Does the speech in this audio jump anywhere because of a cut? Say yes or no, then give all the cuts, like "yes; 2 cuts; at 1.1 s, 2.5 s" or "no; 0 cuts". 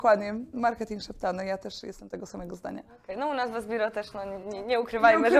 no; 0 cuts